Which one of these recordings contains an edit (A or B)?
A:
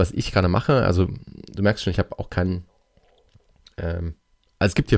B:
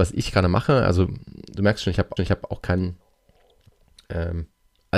B